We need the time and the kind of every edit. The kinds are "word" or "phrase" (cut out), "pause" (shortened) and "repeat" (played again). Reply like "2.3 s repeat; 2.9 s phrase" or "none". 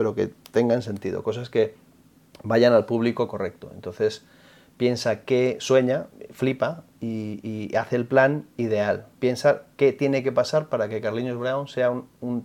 none